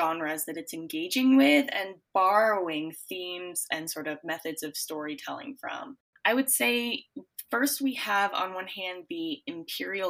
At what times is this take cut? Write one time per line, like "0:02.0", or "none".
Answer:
none